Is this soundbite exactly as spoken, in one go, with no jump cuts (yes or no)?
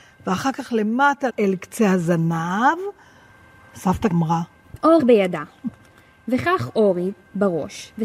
no